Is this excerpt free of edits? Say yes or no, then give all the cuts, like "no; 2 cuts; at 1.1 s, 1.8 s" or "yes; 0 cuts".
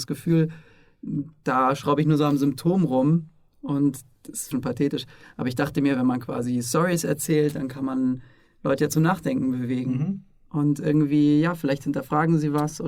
no; 1 cut; at 4.5 s